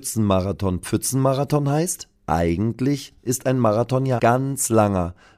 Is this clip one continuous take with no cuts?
no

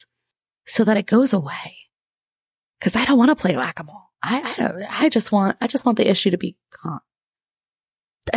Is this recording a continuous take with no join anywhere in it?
yes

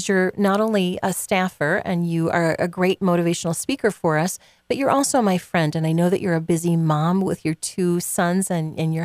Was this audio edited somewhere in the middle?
no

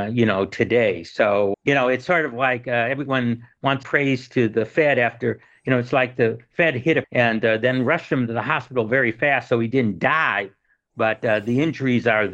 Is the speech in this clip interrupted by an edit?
yes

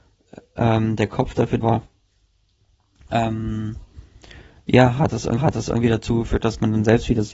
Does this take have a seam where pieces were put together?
yes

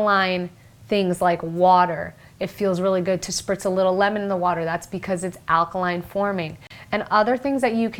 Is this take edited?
no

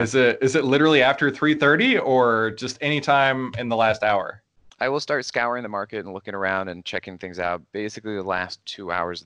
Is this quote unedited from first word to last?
yes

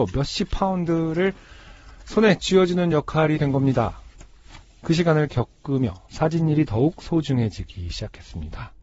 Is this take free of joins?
yes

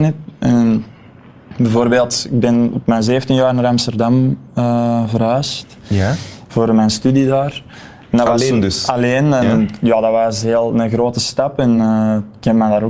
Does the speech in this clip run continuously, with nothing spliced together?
yes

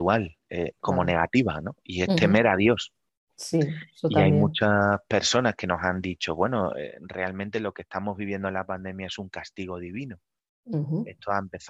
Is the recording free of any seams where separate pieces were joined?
yes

